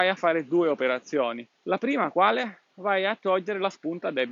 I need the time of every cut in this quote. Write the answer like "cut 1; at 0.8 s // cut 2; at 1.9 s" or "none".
cut 1; at 1.5 s